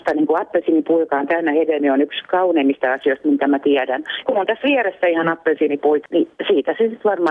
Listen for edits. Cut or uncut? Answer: cut